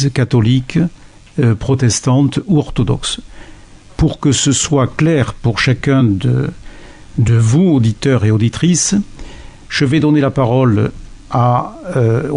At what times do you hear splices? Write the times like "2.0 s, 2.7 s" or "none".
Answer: none